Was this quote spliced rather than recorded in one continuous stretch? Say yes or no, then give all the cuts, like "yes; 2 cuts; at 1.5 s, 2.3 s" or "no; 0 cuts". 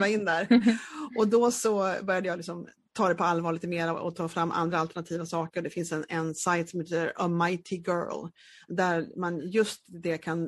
no; 0 cuts